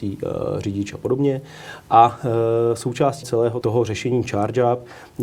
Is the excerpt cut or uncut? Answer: cut